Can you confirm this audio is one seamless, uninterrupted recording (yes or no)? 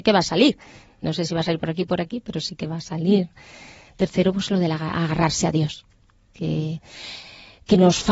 yes